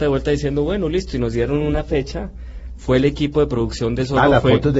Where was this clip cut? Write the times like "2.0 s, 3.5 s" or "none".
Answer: none